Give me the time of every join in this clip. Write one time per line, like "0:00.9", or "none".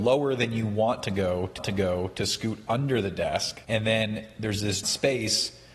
0:01.6
0:03.6
0:04.8

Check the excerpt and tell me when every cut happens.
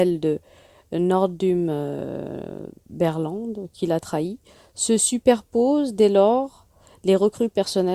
none

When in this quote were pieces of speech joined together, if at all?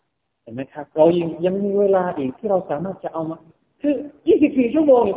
0:00.9
0:03.5

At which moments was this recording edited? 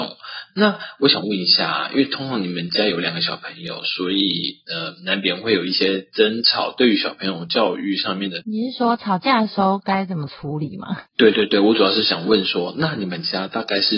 0:08.4

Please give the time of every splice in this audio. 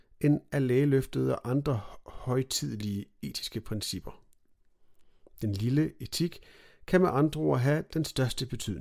none

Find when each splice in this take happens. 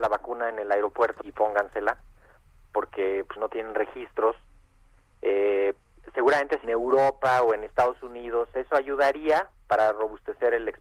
0:01.2
0:03.4
0:06.6

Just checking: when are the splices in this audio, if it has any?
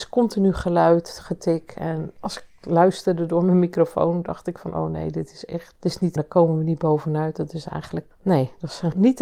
0:06.2
0:08.1

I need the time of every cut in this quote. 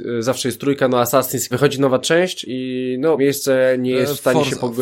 0:01.5
0:02.4
0:03.2

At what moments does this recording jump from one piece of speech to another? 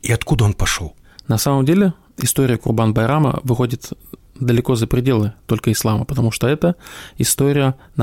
none

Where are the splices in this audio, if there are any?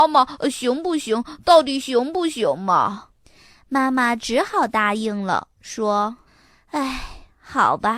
0:03.2
0:06.3

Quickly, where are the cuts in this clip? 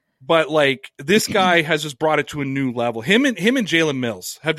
none

